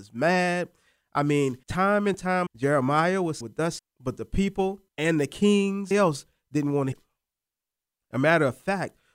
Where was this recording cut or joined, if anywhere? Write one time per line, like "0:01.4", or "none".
0:01.6
0:02.5
0:03.4
0:03.8
0:04.9
0:05.9
0:06.9